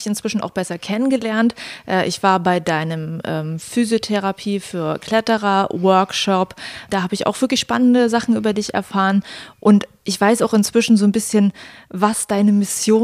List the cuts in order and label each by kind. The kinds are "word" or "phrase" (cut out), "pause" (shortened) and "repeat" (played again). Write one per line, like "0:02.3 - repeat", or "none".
none